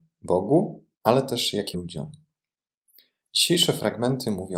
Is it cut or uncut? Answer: cut